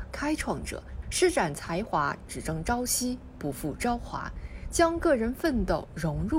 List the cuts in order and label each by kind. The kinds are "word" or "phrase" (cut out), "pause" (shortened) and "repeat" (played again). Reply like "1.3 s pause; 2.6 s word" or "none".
1.0 s phrase; 2.2 s phrase